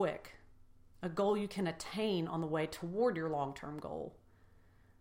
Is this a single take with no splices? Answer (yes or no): yes